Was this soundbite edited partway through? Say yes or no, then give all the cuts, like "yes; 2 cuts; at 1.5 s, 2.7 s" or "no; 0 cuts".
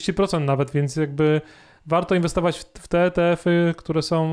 no; 0 cuts